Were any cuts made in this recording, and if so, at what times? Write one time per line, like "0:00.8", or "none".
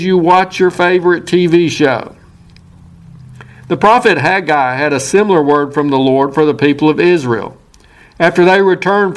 none